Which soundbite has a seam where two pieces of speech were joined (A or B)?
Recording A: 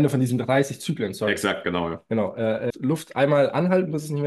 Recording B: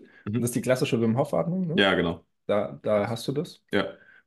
A